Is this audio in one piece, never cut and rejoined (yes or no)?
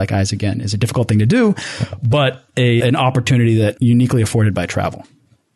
no